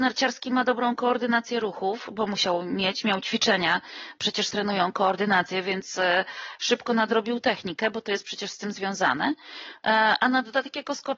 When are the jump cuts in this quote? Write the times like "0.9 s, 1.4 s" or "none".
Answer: 4.5 s